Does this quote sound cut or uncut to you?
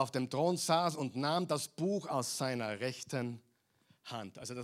uncut